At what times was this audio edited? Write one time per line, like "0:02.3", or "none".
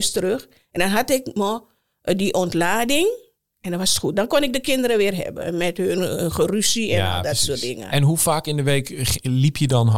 none